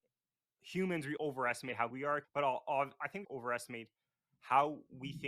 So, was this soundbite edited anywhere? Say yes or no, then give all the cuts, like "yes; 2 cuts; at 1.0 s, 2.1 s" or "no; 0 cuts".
yes; 4 cuts; at 1.2 s, 1.9 s, 2.2 s, 3.2 s